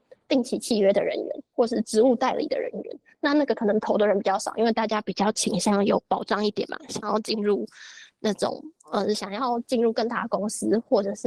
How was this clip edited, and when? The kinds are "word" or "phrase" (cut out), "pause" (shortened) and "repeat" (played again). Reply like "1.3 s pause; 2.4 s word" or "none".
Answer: 1.5 s pause